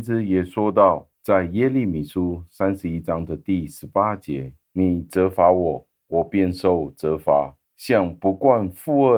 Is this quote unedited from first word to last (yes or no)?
no